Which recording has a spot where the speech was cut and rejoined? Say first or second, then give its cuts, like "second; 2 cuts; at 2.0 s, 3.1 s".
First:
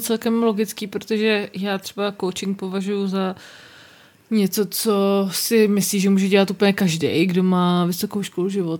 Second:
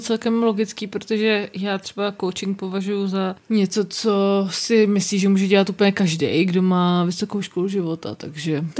second; 1 cut; at 3.3 s